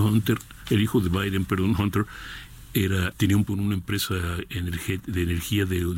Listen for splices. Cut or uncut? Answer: cut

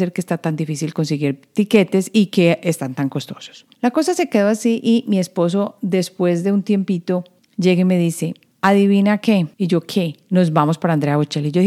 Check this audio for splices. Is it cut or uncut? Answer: cut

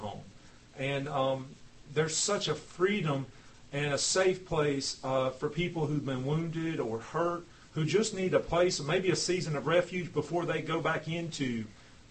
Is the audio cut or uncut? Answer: uncut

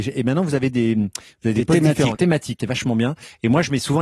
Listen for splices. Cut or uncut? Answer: cut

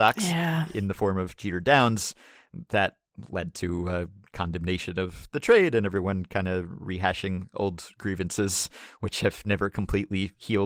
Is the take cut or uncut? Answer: uncut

